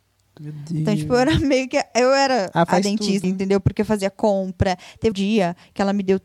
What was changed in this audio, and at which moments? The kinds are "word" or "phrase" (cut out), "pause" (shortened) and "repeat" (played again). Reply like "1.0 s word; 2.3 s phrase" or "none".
3.2 s word; 5.1 s word